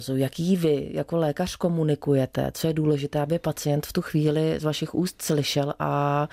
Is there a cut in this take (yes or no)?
no